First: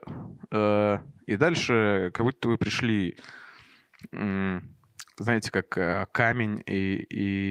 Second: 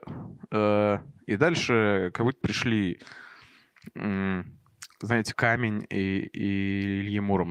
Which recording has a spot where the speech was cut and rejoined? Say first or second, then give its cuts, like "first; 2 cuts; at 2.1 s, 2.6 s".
second; 2 cuts; at 2.4 s, 5.3 s